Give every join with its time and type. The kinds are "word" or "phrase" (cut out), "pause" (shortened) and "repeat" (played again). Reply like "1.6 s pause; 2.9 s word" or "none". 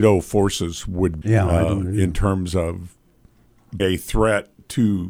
1.2 s word; 3.8 s word